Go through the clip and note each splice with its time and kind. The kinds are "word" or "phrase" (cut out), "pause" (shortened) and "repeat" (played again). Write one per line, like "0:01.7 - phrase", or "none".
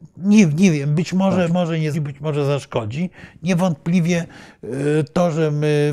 0:01.5 - word
0:01.9 - word